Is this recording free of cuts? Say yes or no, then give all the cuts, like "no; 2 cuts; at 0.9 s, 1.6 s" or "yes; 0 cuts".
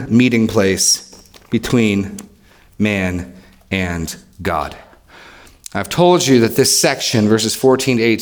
yes; 0 cuts